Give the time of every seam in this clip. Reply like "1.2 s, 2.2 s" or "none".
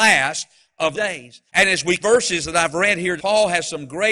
0.9 s, 1.5 s, 2.0 s, 3.2 s